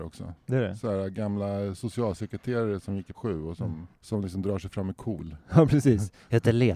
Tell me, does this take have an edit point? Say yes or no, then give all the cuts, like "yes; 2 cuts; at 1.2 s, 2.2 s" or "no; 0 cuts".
yes; 2 cuts; at 3.1 s, 3.9 s